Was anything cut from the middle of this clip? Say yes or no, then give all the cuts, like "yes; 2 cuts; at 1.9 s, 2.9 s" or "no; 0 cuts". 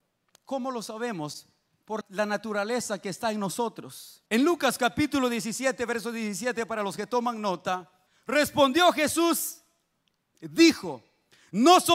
yes; 3 cuts; at 2.0 s, 4.3 s, 8.1 s